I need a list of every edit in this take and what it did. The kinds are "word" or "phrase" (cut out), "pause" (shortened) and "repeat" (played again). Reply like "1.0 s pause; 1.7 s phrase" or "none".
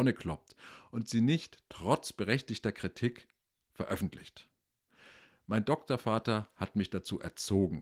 none